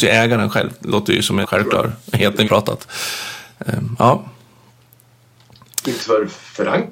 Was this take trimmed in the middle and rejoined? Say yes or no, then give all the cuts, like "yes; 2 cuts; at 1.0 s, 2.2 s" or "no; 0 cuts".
yes; 3 cuts; at 1.4 s, 2.4 s, 6.0 s